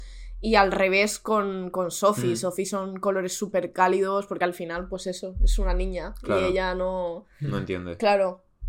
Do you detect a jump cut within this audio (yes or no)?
no